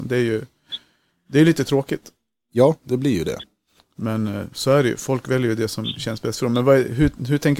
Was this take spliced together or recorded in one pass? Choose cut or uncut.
uncut